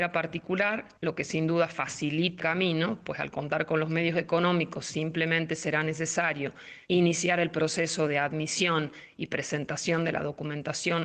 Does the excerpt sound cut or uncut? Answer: cut